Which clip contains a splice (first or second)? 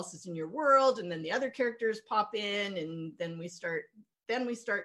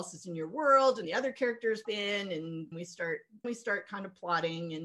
second